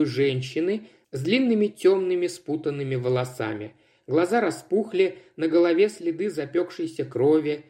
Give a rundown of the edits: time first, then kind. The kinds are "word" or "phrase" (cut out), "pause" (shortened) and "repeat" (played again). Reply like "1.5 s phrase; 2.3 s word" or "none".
none